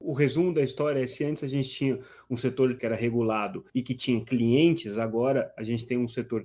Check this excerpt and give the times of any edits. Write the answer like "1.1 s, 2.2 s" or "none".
2.8 s, 3.7 s